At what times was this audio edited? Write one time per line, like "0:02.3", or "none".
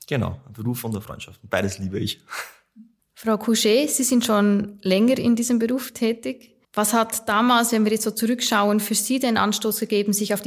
0:03.0
0:06.6

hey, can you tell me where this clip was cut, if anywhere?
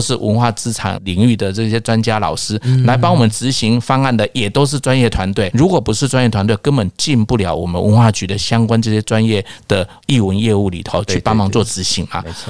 0:05.5

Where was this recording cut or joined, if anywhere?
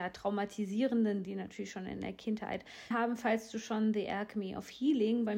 0:01.2
0:02.9

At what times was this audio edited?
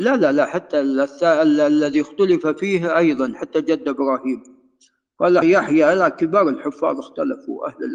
0:05.4

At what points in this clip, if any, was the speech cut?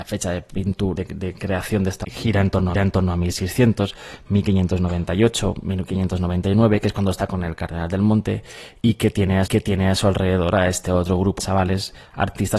0:01.0
0:02.0
0:02.7
0:09.5
0:11.4

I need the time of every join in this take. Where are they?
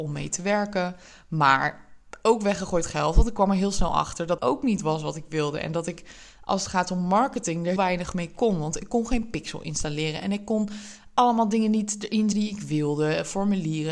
0:04.4
0:07.8
0:12.3

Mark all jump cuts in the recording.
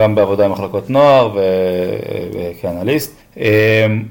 0:03.2

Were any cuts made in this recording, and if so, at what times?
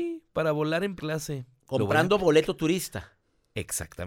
0:01.0

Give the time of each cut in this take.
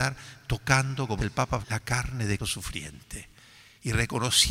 0:01.2
0:01.6
0:02.4

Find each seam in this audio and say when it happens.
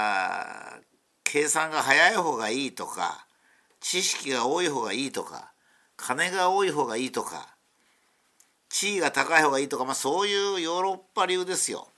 none

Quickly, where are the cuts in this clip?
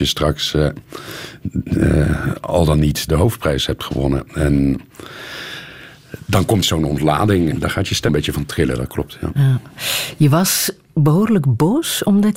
0:03.1
0:06.6
0:07.5
0:08.1

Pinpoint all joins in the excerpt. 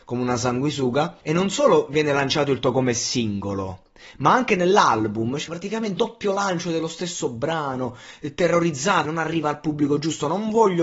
0:01.2
0:02.6
0:05.5
0:06.0
0:09.0

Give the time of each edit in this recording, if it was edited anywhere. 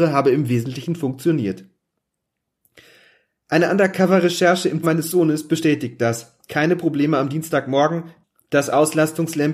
0:04.8

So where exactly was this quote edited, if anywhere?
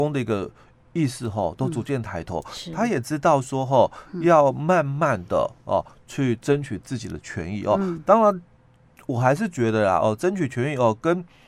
none

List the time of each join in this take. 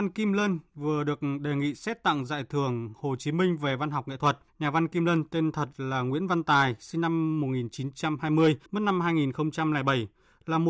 0:04.5
0:08.7

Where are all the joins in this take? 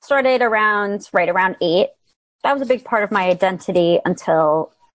none

